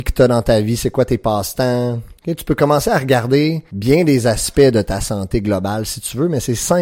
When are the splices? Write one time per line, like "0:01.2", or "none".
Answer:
none